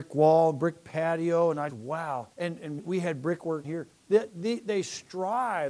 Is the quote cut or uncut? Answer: cut